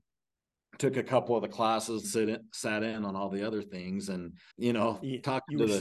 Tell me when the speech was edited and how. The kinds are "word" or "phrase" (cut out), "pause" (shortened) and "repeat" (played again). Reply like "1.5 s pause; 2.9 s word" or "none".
2.0 s word; 4.5 s word